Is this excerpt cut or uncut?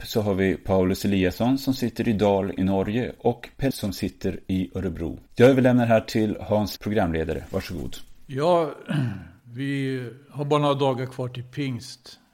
cut